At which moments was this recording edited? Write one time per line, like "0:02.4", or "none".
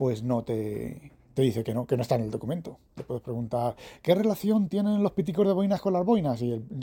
none